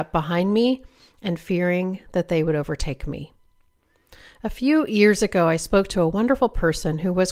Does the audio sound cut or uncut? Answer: uncut